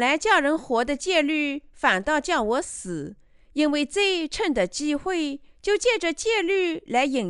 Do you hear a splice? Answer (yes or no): no